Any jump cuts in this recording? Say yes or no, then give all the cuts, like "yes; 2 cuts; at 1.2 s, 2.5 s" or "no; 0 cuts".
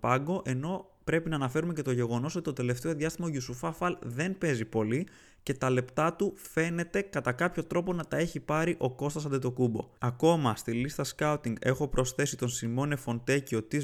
no; 0 cuts